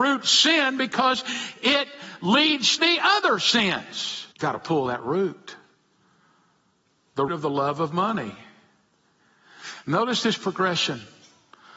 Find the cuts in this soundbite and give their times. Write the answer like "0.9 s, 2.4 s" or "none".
2.8 s, 4.3 s, 7.3 s